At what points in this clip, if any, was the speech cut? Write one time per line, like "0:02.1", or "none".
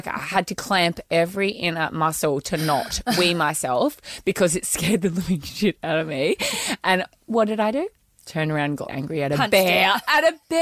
0:08.9